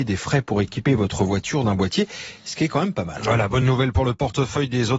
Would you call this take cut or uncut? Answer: uncut